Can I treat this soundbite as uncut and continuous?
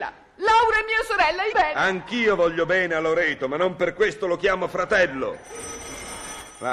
no; 1 cut; at 1.5 s

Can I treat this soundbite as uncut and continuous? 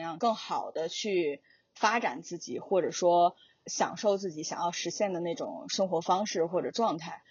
yes; 0 cuts

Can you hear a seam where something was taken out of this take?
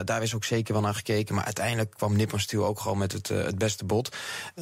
no; 0 cuts

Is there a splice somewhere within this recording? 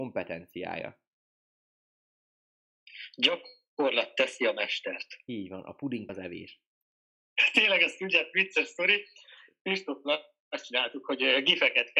yes; 1 cut; at 6.1 s

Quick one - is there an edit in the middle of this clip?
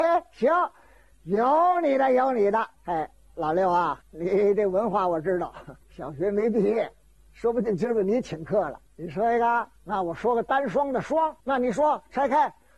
yes; 7 cuts; at 2.7 s, 4.0 s, 5.8 s, 7.2 s, 8.9 s, 9.8 s, 11.4 s

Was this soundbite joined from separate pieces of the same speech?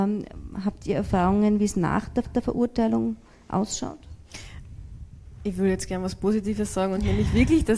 yes; 1 cut; at 2.2 s

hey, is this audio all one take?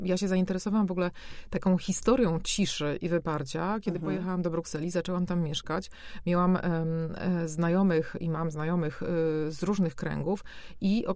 yes; 0 cuts

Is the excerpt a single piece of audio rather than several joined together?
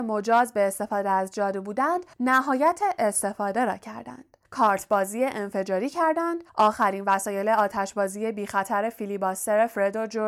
no; 3 cuts; at 2.1 s, 4.4 s, 6.5 s

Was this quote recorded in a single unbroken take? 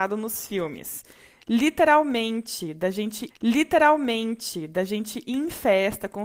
no; 1 cut; at 3.3 s

